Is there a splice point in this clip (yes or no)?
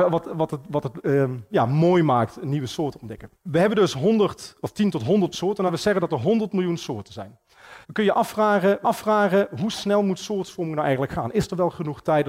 yes